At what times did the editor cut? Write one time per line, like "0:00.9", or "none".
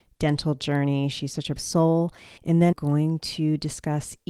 0:01.6
0:02.4
0:02.7